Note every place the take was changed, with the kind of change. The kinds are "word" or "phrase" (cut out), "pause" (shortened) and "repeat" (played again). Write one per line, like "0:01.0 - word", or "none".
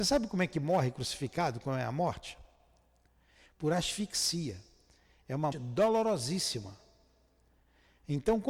0:05.5 - word